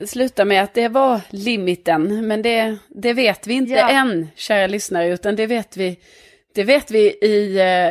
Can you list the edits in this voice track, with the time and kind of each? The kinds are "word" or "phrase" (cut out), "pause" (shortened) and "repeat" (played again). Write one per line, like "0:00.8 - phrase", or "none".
none